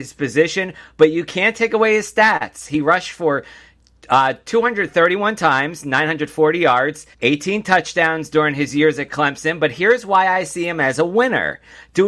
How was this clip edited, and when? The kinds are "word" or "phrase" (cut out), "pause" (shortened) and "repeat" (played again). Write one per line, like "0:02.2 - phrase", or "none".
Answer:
0:07.1 - pause